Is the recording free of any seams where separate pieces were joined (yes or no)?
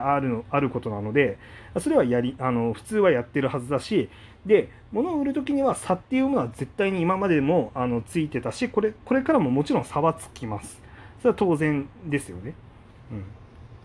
no